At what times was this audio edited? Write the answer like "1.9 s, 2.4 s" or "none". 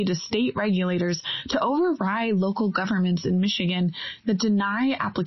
none